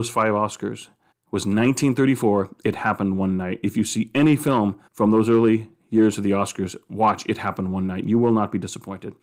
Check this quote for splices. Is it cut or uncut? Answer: cut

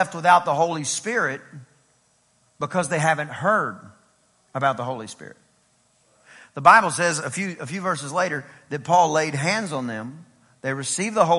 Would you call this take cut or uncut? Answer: uncut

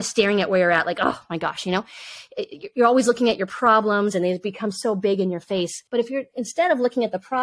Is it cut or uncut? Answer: cut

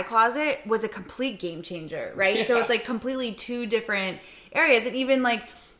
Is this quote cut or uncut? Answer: uncut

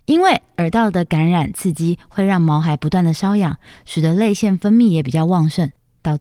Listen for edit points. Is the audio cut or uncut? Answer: uncut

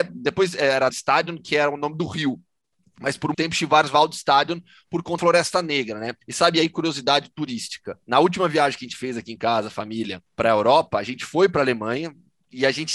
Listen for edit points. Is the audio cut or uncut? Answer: cut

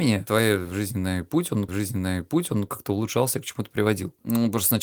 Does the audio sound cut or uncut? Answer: cut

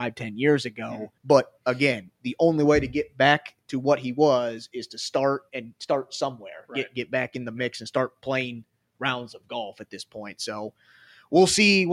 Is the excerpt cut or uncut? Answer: cut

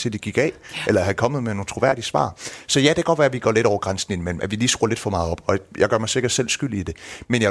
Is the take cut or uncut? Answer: uncut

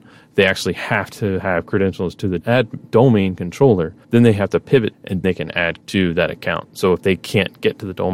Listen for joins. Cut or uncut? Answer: cut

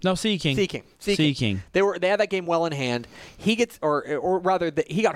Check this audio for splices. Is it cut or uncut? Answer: uncut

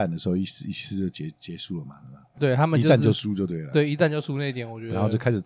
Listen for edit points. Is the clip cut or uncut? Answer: cut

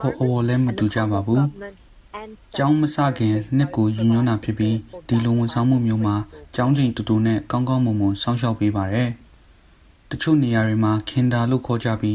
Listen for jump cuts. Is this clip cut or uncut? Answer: uncut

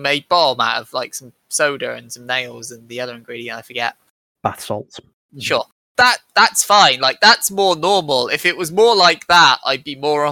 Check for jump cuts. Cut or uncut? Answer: uncut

